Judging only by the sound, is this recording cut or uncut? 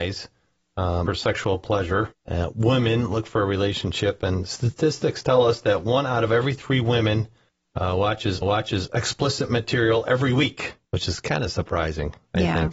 cut